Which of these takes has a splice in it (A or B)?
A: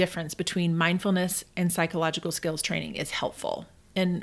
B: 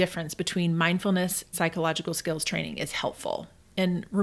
B